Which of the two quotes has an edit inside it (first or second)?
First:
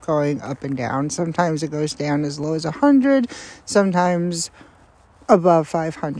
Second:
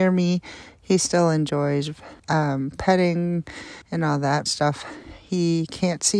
second